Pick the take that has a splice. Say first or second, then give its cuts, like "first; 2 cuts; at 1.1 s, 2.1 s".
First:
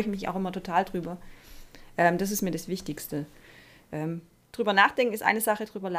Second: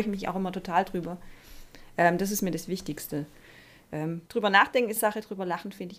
second; 2 cuts; at 4.3 s, 5.0 s